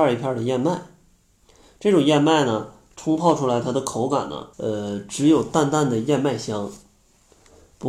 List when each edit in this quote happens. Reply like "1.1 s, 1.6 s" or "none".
4.5 s